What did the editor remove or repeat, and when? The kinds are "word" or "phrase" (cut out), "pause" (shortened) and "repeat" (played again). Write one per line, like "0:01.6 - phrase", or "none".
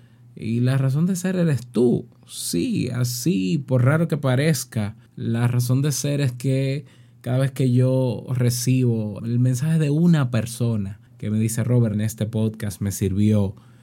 0:05.1 - pause
0:09.2 - word
0:11.1 - pause
0:11.9 - phrase